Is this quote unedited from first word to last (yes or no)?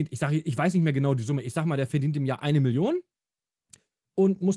yes